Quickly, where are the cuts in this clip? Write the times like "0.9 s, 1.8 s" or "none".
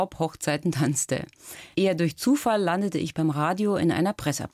1.7 s

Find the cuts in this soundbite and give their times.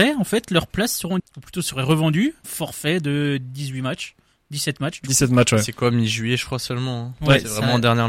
1.2 s, 2.4 s

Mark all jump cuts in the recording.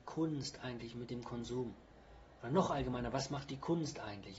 none

